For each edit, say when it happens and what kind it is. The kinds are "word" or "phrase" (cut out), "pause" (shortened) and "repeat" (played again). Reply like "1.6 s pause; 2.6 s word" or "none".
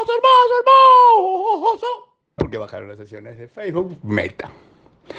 2.4 s phrase